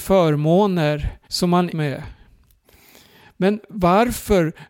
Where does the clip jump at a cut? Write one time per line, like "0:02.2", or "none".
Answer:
0:01.2
0:01.7